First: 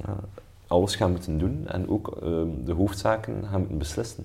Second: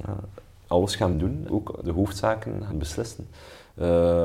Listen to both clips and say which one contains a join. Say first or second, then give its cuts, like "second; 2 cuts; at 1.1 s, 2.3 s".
second; 4 cuts; at 1.1 s, 1.5 s, 1.8 s, 2.7 s